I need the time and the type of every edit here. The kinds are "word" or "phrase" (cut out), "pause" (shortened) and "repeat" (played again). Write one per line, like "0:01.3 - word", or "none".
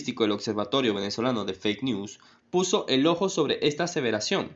none